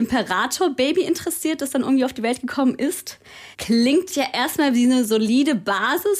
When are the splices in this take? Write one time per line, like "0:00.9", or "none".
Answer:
0:03.5